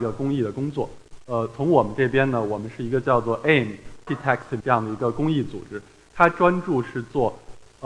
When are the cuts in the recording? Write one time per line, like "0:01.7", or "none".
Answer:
0:04.1
0:04.6